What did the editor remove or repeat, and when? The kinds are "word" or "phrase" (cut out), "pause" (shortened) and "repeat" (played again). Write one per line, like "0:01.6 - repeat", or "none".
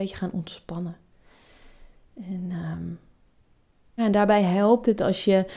0:04.0 - word